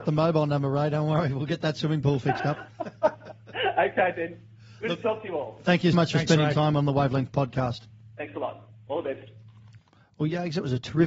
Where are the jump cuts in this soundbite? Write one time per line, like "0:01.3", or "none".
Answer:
0:05.9